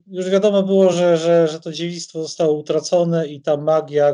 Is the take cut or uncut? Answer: uncut